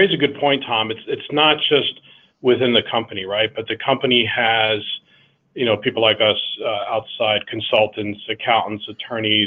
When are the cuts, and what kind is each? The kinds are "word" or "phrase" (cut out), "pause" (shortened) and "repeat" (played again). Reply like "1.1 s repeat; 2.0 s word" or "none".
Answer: none